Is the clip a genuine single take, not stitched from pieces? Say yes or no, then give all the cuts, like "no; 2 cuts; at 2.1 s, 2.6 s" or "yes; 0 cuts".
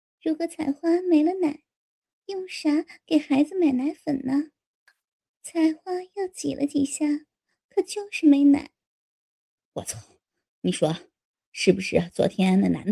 yes; 0 cuts